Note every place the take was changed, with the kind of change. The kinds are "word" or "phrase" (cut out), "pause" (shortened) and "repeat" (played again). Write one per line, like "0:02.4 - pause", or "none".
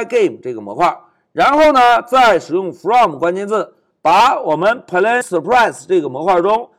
0:05.2 - word